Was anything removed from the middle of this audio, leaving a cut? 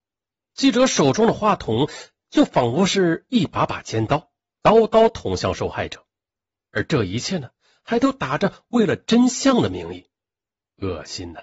no; 0 cuts

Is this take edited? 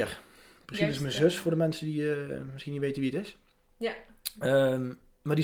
no; 0 cuts

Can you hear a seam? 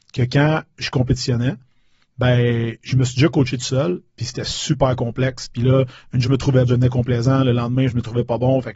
yes; 2 cuts; at 6.2 s, 6.6 s

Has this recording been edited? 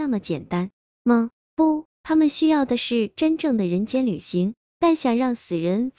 yes; 1 cut; at 1.9 s

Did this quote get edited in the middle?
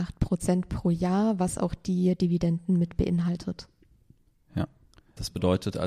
no; 0 cuts

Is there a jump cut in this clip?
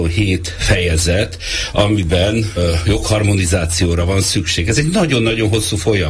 yes; 1 cut; at 2.6 s

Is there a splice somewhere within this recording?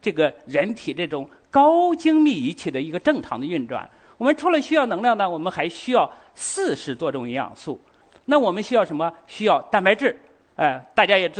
no; 0 cuts

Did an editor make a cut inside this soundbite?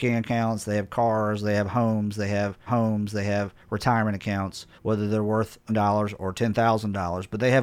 yes; 3 cuts; at 2.7 s, 4.8 s, 5.7 s

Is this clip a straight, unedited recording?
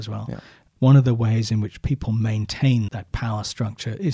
no; 1 cut; at 2.9 s

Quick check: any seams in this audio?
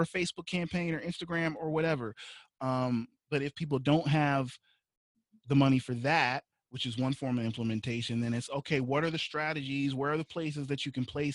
no; 0 cuts

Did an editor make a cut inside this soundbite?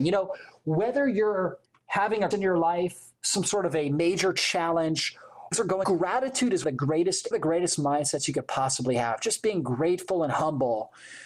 yes; 6 cuts; at 1.7 s, 2.3 s, 5.5 s, 5.8 s, 6.6 s, 7.3 s

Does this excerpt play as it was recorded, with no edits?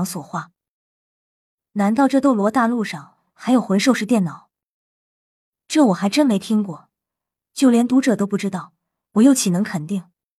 yes; 0 cuts

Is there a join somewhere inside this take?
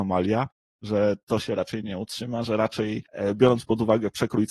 yes; 2 cuts; at 1.2 s, 2.4 s

